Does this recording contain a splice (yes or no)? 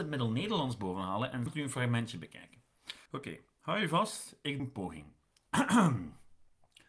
yes